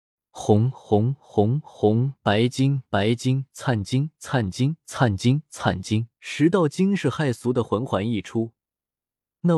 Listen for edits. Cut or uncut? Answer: cut